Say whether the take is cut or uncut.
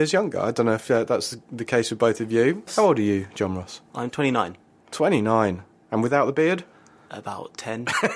uncut